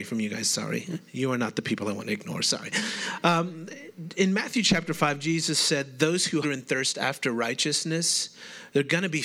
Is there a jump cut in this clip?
yes; 1 cut; at 6.4 s

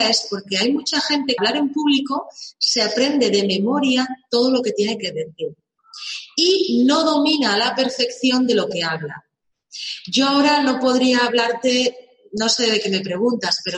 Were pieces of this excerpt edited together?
yes; 1 cut; at 1.4 s

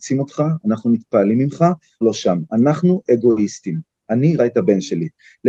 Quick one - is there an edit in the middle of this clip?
yes; 2 cuts; at 2.0 s, 4.4 s

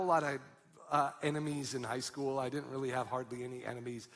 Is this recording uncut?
yes; 0 cuts

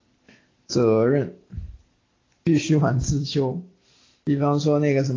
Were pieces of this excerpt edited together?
no; 0 cuts

